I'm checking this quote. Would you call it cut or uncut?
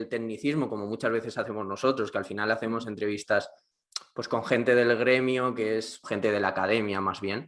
cut